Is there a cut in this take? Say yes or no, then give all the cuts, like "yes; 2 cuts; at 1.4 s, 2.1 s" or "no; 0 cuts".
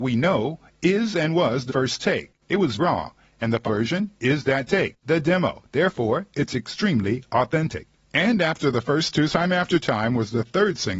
yes; 6 cuts; at 1.7 s, 2.8 s, 3.6 s, 5.0 s, 7.9 s, 9.3 s